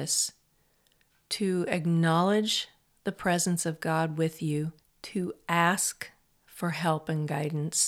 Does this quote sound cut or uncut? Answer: cut